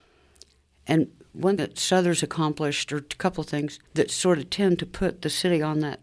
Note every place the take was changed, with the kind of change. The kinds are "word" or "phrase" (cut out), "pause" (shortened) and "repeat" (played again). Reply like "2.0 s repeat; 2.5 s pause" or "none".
1.6 s word; 3.9 s pause